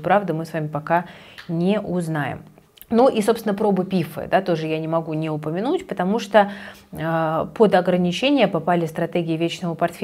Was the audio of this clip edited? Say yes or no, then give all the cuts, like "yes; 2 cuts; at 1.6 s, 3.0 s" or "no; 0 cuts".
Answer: yes; 1 cut; at 2.7 s